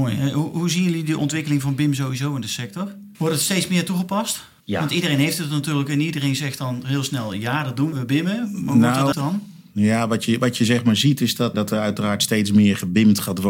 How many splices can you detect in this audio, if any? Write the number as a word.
five